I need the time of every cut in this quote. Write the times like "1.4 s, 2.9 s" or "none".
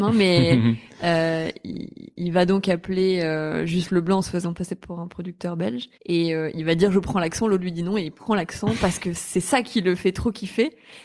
5.9 s